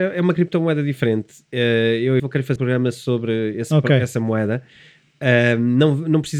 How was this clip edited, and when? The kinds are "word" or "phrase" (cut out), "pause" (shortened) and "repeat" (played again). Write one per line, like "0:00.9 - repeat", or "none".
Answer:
0:02.2 - word
0:02.6 - word
0:04.1 - word